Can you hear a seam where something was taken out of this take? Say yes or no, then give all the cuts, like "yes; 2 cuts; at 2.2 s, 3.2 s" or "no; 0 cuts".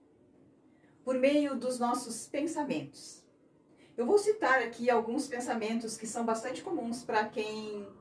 no; 0 cuts